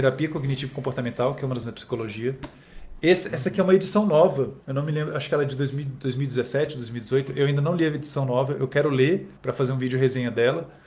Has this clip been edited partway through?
yes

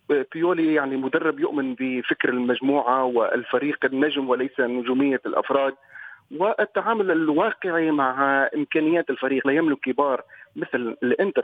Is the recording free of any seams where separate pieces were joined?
no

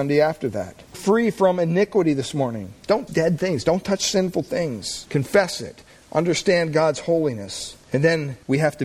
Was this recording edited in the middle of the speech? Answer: yes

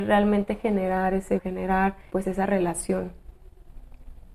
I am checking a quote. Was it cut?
yes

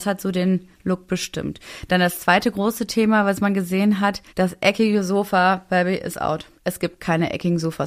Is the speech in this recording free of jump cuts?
no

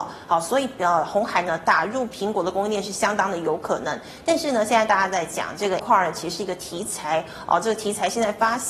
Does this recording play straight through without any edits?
no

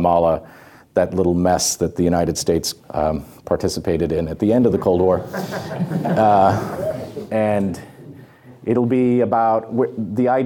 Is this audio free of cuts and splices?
no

